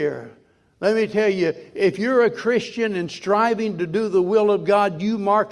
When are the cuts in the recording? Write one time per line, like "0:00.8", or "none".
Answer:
none